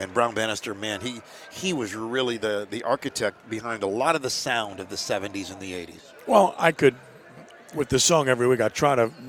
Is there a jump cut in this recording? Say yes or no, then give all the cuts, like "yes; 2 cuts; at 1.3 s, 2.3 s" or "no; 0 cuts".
no; 0 cuts